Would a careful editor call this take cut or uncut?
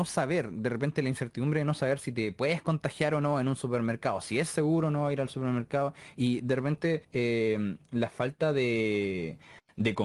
cut